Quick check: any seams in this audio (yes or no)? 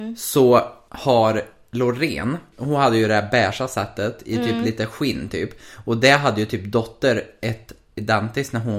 no